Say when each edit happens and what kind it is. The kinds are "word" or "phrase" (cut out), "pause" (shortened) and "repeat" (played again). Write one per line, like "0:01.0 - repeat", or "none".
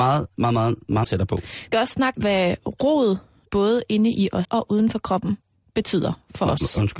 0:01.0 - word
0:01.7 - word
0:02.1 - word
0:03.5 - word
0:04.4 - word